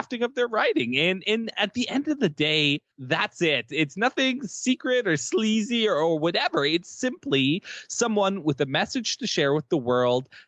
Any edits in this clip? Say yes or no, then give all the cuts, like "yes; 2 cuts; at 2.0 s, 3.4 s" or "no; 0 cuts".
yes; 1 cut; at 2.9 s